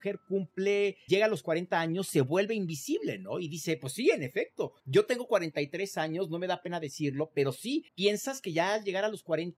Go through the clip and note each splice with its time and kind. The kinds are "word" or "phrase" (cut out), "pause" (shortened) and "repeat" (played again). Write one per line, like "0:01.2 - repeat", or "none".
0:01.1 - word
0:04.8 - pause
0:07.9 - pause